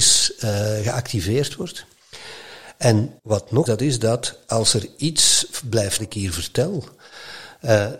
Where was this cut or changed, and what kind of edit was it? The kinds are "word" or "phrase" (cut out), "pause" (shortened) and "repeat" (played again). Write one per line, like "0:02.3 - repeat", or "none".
0:03.2 - pause
0:03.7 - phrase
0:06.0 - phrase